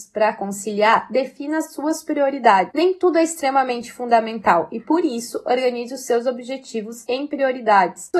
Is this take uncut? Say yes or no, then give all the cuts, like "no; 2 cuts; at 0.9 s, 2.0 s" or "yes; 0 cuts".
yes; 0 cuts